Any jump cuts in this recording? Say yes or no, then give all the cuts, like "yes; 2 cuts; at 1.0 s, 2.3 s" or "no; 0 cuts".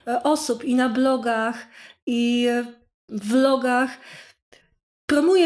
no; 0 cuts